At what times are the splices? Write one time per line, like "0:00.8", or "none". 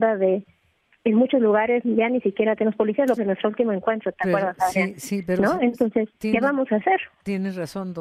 0:03.2
0:06.1